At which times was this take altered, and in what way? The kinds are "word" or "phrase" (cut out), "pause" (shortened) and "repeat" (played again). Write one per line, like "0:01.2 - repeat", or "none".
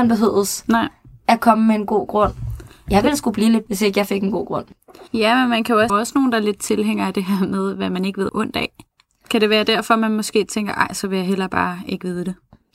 0:03.7 - word
0:05.1 - pause
0:05.9 - phrase
0:08.3 - phrase